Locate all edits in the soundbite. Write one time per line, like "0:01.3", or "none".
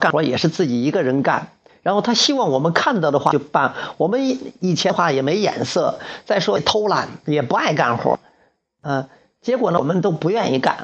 none